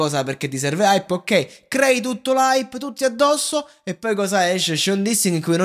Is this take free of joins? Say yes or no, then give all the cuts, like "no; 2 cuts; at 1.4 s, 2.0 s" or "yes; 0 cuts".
yes; 0 cuts